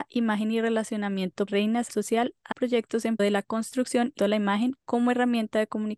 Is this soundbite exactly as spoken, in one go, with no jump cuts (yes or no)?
no